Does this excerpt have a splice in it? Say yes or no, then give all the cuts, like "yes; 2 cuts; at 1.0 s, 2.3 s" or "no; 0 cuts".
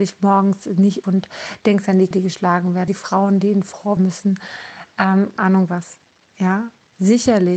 yes; 5 cuts; at 1.0 s, 2.1 s, 2.9 s, 4.0 s, 5.4 s